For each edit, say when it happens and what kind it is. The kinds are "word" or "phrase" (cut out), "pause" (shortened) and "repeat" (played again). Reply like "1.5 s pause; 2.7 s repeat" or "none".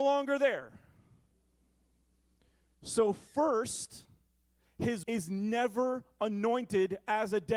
5.0 s word